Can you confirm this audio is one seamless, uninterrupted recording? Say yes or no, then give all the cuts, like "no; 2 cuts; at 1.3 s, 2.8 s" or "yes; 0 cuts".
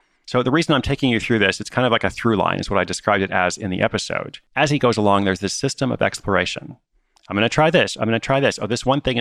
no; 1 cut; at 4.5 s